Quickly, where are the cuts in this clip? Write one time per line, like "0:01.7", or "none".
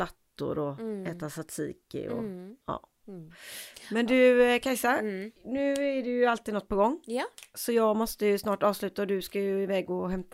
0:02.6